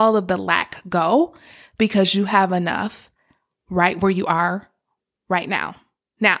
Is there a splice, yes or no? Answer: no